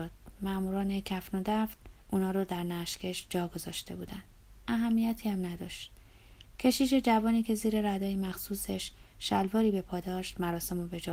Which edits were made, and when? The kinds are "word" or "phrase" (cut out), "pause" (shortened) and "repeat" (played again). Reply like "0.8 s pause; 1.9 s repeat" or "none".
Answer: 2.0 s pause

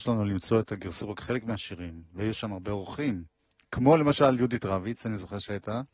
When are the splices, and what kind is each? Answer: 1.0 s phrase

